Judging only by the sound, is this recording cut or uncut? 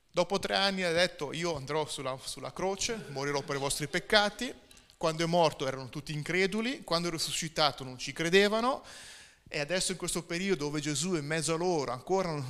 uncut